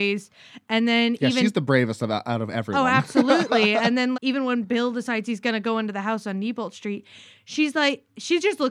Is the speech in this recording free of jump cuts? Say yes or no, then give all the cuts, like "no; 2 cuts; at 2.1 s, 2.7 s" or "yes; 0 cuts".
no; 1 cut; at 4.1 s